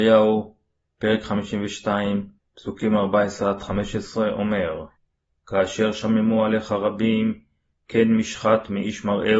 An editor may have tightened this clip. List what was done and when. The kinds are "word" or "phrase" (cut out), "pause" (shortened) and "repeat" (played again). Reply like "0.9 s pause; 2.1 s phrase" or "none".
2.4 s pause